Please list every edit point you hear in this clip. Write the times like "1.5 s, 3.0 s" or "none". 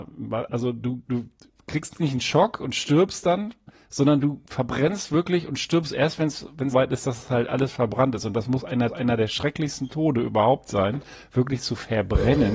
1.1 s, 6.7 s, 8.9 s